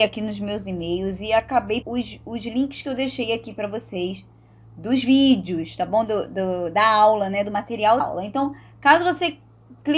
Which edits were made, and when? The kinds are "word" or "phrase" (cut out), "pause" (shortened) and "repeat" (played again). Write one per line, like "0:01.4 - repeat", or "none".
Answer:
0:01.8 - word
0:08.0 - word